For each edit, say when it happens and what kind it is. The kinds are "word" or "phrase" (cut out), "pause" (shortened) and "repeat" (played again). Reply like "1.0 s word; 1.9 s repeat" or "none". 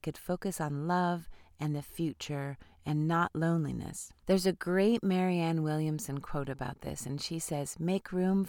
none